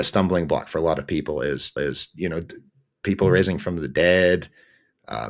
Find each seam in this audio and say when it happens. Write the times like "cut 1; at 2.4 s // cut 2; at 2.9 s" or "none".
cut 1; at 1.8 s